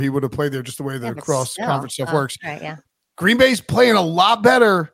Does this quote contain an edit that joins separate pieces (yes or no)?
no